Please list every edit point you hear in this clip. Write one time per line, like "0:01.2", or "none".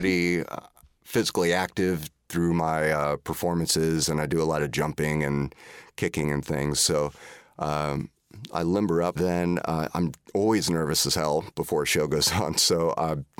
0:09.2